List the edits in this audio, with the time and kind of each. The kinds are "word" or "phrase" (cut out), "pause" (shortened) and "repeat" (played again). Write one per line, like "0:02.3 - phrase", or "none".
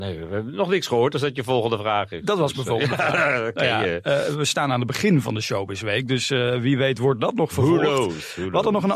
none